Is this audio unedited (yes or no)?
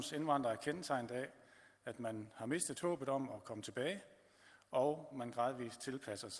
yes